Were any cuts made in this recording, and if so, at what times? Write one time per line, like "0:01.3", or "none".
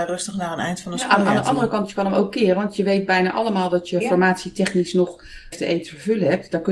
0:05.5